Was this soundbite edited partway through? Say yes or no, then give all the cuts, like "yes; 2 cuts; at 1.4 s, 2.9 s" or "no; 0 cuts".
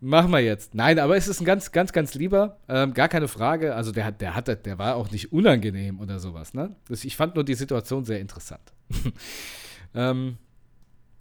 no; 0 cuts